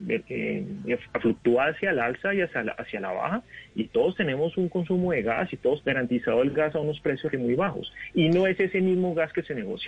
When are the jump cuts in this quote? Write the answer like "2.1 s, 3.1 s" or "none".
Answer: 5.8 s, 7.3 s